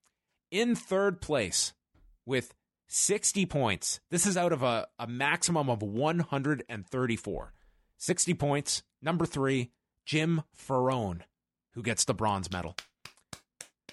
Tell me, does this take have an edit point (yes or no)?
no